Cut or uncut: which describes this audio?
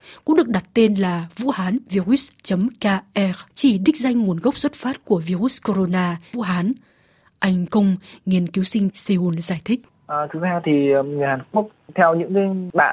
cut